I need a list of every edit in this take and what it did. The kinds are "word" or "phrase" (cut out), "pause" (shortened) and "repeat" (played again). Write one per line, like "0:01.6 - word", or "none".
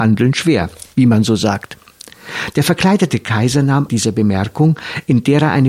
0:03.9 - phrase